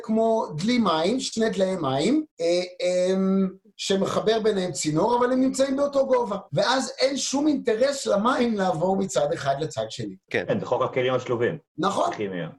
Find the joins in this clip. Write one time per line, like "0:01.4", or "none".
0:02.3
0:06.5
0:10.2
0:11.7